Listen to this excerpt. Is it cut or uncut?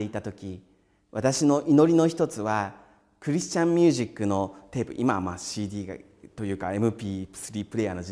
uncut